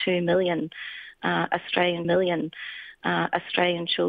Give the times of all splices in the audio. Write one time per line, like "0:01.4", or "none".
0:02.0